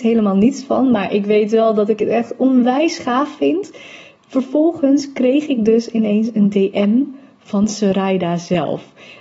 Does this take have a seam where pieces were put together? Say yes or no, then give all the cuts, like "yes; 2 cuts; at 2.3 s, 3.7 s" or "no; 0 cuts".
no; 0 cuts